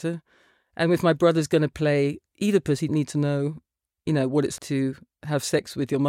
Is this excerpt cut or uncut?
cut